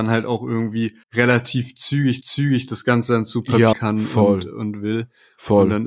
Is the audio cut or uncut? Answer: cut